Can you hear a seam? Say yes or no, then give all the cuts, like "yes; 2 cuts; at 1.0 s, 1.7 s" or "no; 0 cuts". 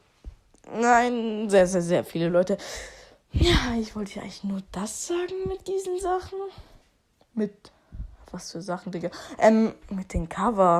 yes; 1 cut; at 6.8 s